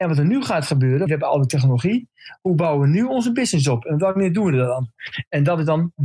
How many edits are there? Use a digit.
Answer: 1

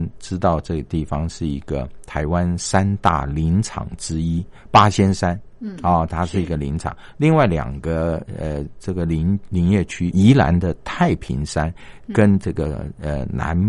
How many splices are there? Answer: 1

